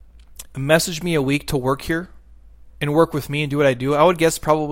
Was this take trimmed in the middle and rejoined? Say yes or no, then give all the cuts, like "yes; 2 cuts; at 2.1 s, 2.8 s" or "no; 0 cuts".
no; 0 cuts